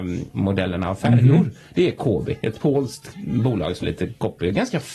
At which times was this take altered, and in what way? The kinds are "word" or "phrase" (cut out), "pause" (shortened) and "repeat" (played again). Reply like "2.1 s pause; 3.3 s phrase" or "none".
3.8 s word